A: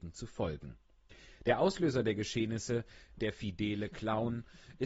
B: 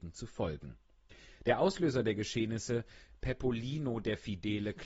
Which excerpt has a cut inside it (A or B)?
A